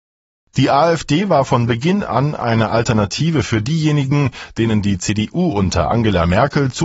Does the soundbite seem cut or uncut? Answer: uncut